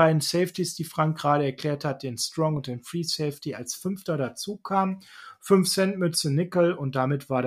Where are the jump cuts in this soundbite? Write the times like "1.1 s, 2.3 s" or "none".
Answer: none